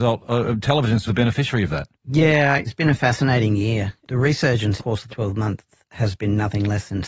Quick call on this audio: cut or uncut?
cut